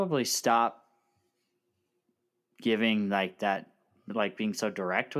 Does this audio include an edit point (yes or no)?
no